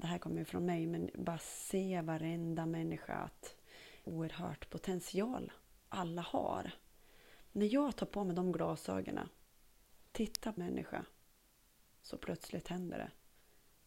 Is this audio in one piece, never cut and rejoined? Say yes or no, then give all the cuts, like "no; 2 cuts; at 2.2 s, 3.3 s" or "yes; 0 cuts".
no; 2 cuts; at 4.0 s, 10.6 s